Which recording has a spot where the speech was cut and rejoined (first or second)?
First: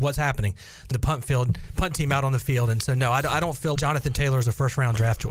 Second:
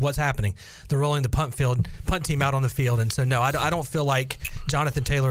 first